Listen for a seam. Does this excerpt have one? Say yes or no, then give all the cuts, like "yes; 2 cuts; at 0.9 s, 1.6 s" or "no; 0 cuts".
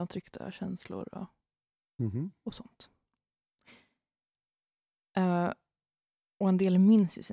no; 0 cuts